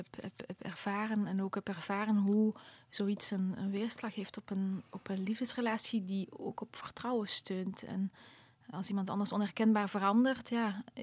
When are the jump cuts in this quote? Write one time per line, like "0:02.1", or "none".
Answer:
0:03.6
0:08.7